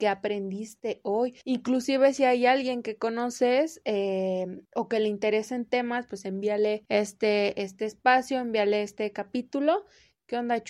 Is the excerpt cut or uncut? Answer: cut